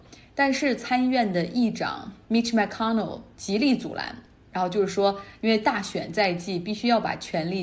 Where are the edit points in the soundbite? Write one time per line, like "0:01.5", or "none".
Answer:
none

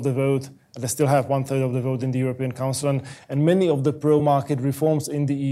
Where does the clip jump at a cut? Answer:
none

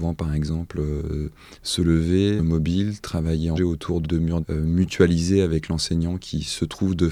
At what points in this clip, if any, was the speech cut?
0:02.4
0:03.6
0:04.0
0:04.4

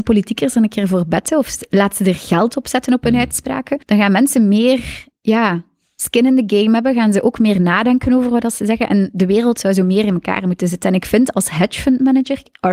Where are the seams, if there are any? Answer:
0:03.8

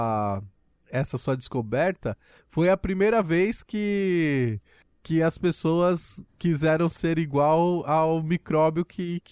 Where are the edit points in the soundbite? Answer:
0:06.3

